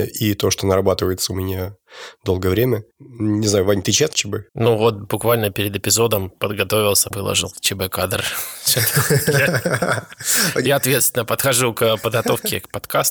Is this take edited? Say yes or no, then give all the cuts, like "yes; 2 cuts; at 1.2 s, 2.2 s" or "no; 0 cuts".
yes; 4 cuts; at 2.9 s, 4.1 s, 4.5 s, 7.1 s